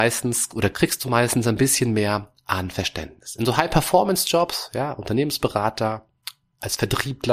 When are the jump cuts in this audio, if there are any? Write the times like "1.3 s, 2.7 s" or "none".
none